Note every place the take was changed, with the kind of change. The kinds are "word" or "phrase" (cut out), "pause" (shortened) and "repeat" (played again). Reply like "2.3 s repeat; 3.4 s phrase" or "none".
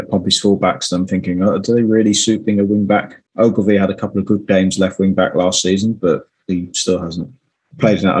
3.3 s pause